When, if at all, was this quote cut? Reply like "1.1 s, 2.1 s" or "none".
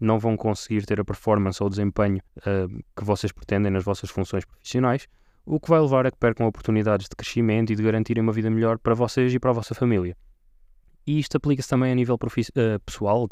2.3 s